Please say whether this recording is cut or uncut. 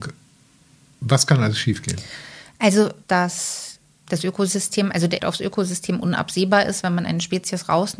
cut